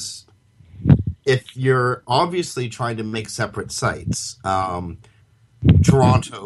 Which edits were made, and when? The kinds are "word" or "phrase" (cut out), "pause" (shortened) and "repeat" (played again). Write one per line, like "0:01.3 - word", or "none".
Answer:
0:01.2 - pause